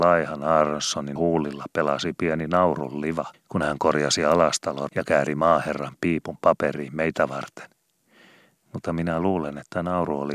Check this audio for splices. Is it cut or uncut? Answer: cut